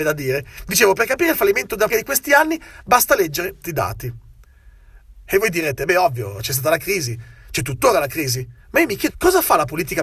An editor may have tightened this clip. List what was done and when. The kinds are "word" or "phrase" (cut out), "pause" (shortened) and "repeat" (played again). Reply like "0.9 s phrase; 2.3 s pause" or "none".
1.9 s word; 3.6 s word; 8.6 s pause; 9.1 s word